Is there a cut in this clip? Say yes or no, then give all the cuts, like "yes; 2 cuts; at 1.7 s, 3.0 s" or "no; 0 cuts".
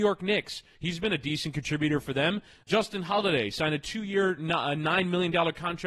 no; 0 cuts